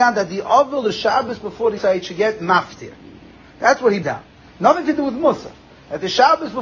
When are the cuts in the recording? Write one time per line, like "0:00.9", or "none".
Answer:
0:01.8
0:04.0